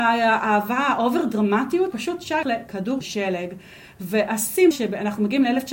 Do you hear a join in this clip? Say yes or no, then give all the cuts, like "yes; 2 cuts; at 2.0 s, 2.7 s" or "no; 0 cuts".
yes; 4 cuts; at 1.9 s, 2.4 s, 3.0 s, 4.7 s